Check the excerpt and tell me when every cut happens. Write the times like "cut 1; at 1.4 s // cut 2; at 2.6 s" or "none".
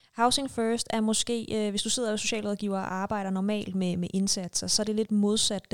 none